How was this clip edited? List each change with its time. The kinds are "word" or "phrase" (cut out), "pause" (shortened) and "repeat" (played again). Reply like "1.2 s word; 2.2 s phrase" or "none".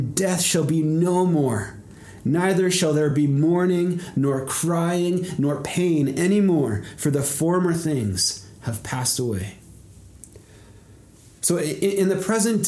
none